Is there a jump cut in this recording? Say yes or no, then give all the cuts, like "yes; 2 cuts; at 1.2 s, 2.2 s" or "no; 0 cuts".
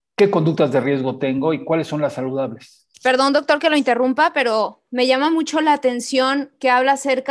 yes; 1 cut; at 2.9 s